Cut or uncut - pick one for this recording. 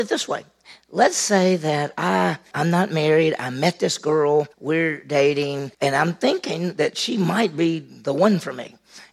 cut